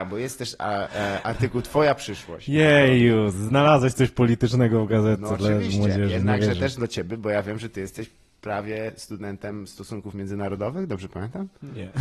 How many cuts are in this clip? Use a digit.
0